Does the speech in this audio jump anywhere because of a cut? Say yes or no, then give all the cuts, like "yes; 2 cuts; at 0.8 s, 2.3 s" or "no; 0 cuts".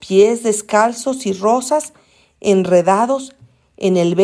no; 0 cuts